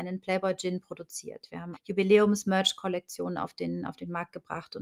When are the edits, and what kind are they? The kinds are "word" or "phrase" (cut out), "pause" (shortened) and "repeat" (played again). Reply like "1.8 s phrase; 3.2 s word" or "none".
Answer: 1.7 s word